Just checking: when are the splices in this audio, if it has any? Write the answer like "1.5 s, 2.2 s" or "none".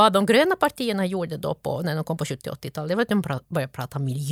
none